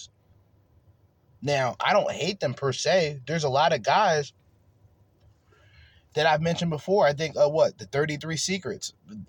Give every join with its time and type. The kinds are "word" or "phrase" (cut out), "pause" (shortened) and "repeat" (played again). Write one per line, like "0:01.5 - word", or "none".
none